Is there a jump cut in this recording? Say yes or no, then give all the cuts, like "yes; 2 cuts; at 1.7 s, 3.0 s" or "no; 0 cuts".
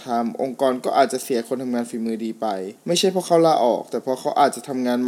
yes; 1 cut; at 2.8 s